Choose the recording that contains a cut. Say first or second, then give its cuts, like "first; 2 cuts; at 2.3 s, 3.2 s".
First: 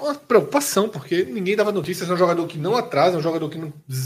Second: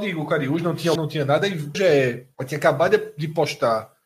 second; 3 cuts; at 1.0 s, 1.7 s, 2.3 s